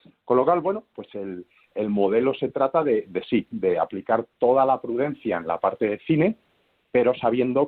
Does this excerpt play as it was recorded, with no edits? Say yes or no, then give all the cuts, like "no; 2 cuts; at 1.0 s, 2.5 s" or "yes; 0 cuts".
yes; 0 cuts